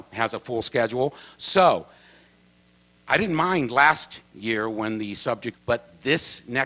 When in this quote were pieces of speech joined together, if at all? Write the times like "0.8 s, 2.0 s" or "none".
5.5 s